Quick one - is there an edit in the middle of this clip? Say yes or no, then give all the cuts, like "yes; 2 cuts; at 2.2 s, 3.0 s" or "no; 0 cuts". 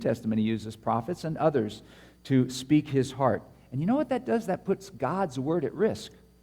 no; 0 cuts